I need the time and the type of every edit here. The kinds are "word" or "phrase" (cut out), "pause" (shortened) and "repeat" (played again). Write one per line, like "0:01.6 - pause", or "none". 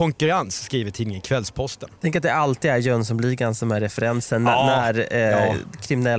none